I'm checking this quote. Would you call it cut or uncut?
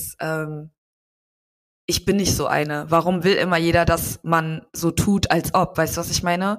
uncut